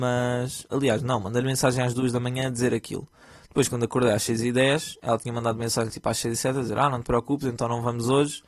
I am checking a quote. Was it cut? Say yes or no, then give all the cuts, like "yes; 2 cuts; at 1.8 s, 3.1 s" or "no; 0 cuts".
no; 0 cuts